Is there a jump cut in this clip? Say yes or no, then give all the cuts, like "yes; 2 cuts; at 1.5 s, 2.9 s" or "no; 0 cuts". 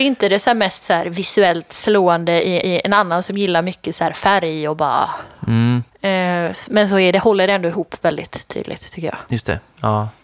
yes; 2 cuts; at 2.6 s, 5.9 s